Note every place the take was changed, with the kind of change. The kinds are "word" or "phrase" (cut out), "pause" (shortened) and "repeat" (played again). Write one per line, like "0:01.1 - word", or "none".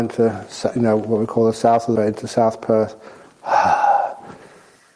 0:02.0 - word